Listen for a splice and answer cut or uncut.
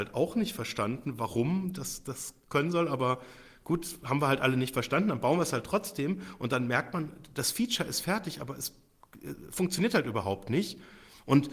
uncut